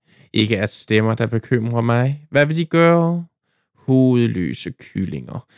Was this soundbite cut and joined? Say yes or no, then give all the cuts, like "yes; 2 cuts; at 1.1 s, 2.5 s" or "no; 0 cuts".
no; 0 cuts